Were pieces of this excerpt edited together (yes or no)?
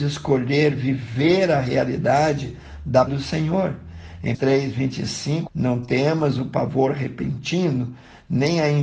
yes